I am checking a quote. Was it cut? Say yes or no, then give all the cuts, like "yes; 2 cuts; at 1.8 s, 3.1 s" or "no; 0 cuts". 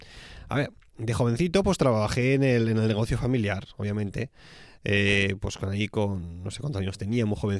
no; 0 cuts